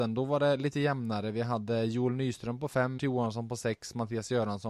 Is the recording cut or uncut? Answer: cut